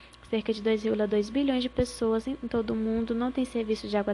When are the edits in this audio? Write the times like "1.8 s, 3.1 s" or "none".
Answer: none